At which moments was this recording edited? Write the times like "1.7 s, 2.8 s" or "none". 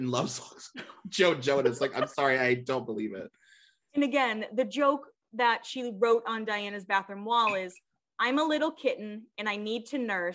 none